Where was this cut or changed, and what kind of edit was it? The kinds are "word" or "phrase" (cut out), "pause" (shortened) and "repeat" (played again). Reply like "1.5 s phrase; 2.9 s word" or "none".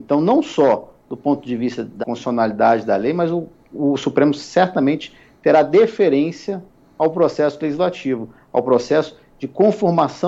2.0 s phrase